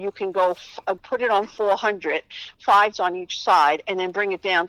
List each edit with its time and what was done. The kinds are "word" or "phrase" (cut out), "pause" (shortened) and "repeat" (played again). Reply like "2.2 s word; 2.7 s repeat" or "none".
1.0 s word; 2.9 s word

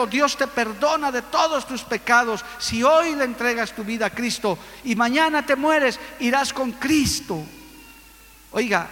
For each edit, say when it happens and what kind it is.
none

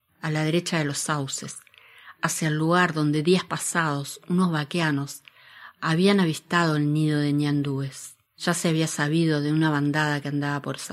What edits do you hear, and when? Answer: 8.3 s pause

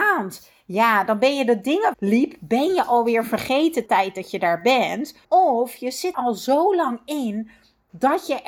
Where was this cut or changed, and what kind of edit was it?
1.9 s phrase; 3.9 s phrase; 5.2 s pause; 6.1 s word

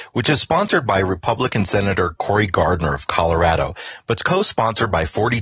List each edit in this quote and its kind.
none

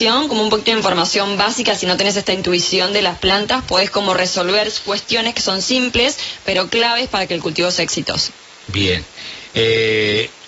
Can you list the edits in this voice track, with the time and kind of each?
none

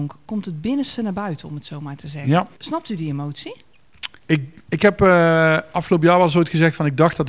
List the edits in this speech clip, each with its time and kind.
2.5 s pause; 4.2 s pause

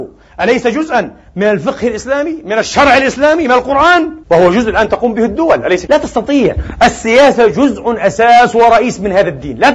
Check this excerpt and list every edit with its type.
4.2 s pause; 5.9 s word

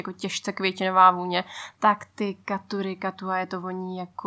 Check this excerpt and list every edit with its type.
none

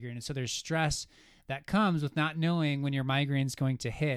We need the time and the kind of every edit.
none

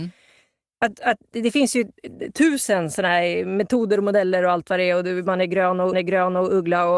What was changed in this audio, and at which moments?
5.9 s repeat

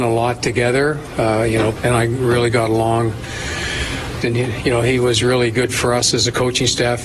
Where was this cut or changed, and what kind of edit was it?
1.8 s word; 4.2 s phrase

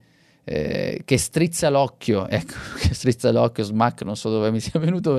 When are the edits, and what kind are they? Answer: none

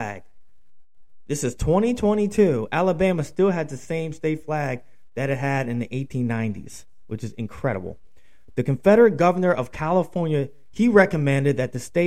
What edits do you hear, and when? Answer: none

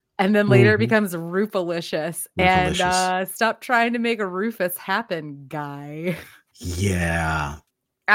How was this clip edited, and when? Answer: none

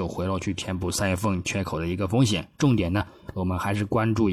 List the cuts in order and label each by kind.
2.5 s pause

